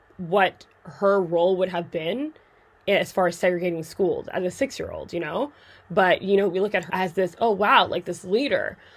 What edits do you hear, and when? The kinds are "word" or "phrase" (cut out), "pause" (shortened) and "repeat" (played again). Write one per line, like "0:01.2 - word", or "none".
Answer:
0:06.9 - word